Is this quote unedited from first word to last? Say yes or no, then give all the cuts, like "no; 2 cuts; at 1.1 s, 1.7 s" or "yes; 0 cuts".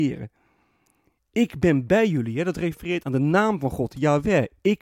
no; 1 cut; at 3.0 s